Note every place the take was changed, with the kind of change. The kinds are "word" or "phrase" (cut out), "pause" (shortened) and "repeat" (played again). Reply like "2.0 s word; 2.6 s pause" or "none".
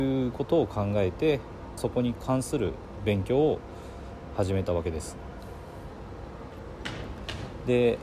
1.8 s phrase